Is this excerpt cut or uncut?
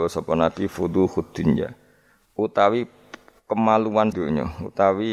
cut